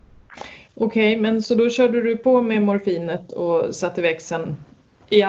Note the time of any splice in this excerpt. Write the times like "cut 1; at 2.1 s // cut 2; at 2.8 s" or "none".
none